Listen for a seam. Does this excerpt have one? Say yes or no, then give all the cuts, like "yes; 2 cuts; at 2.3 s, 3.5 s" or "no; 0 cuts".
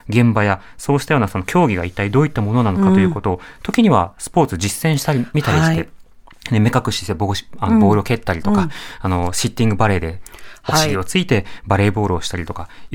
no; 0 cuts